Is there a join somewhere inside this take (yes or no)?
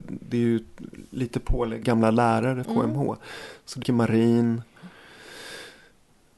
yes